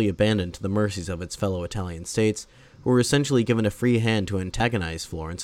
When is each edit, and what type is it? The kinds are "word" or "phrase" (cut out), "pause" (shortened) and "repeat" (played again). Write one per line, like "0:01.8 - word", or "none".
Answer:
none